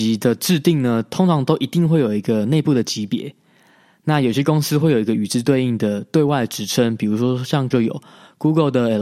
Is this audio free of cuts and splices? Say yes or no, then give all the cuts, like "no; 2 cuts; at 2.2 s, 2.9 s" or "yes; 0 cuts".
no; 1 cut; at 7.7 s